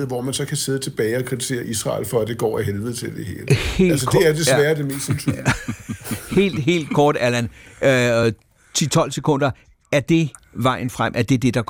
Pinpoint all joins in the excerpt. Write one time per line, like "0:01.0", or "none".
none